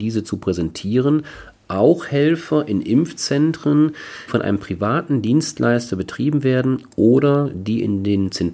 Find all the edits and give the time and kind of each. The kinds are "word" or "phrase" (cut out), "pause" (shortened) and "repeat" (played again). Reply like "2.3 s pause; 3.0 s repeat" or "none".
4.3 s word